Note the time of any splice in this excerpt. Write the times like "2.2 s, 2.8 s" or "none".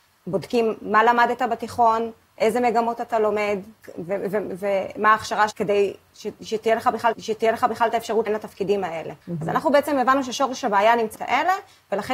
5.5 s, 7.1 s, 8.3 s, 9.2 s, 11.2 s